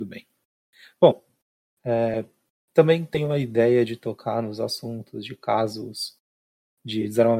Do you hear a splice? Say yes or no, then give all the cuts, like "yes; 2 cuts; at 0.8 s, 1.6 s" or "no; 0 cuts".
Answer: no; 0 cuts